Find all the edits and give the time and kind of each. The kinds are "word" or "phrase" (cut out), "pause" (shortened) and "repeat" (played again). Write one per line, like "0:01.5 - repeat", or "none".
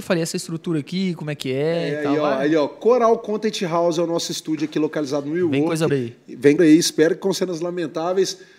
0:05.9 - phrase
0:06.6 - phrase